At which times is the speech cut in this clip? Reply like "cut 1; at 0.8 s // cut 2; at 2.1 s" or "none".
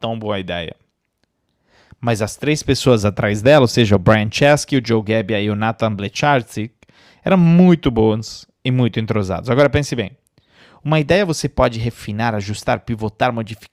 none